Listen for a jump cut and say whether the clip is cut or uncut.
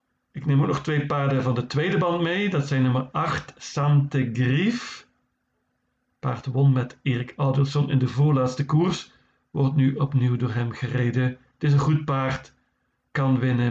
uncut